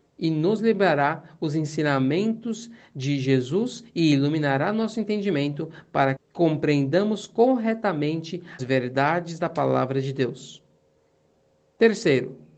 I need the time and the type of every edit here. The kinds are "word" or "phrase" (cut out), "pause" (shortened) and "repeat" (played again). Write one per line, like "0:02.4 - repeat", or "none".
0:06.2 - word
0:08.6 - word